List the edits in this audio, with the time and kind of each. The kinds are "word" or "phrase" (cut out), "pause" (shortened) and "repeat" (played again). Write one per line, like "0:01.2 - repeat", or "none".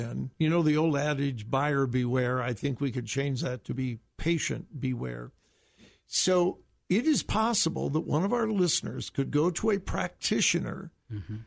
none